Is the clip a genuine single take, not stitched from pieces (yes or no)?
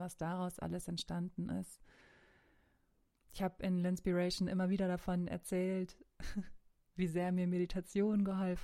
yes